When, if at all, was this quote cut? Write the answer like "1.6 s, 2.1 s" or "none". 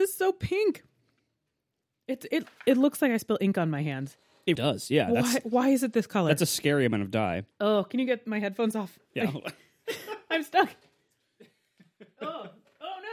4.6 s